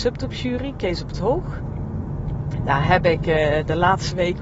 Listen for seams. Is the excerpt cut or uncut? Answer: uncut